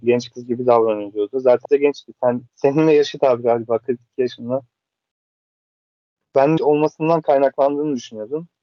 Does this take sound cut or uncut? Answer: cut